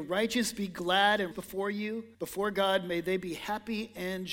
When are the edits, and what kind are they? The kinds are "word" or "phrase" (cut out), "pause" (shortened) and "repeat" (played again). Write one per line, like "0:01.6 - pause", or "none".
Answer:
0:01.3 - word
0:02.1 - pause